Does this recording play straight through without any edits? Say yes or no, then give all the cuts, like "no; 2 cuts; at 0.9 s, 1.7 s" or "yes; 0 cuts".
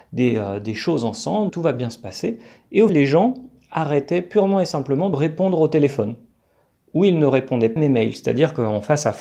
no; 4 cuts; at 1.5 s, 2.9 s, 5.1 s, 7.8 s